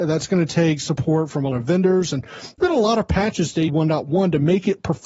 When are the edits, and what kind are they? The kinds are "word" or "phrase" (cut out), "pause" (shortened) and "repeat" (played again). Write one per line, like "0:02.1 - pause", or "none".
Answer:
0:01.5 - word
0:02.6 - word
0:03.7 - word

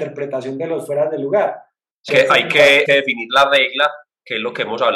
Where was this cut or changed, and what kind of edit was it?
0:02.1 - word
0:02.8 - word

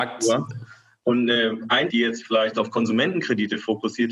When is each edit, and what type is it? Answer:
0:01.9 - word

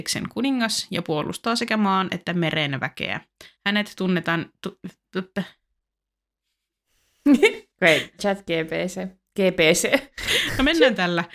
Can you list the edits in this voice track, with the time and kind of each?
0:03.6 - pause
0:07.7 - pause
0:08.2 - word

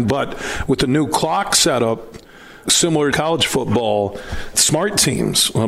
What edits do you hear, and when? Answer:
0:02.7 - word
0:03.1 - phrase
0:04.5 - word

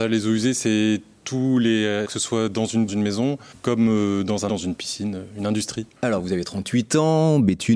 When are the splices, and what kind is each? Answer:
0:02.0 - phrase
0:02.9 - phrase
0:03.5 - pause
0:04.5 - word
0:06.0 - pause

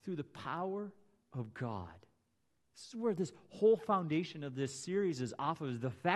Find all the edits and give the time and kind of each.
none

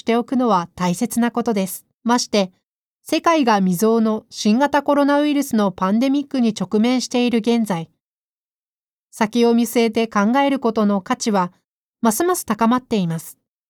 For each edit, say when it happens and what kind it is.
0:01.9 - pause

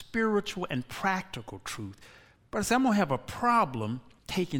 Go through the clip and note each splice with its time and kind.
none

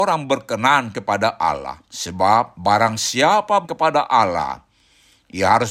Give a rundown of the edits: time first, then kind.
0:01.9 - pause
0:03.6 - word

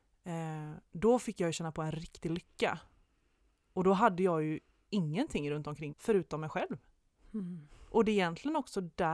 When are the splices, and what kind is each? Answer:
0:05.9 - word

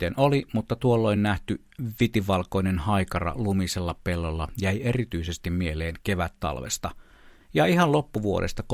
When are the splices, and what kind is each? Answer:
none

